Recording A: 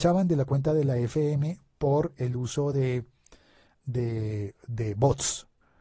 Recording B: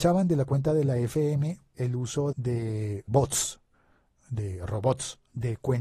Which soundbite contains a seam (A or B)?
B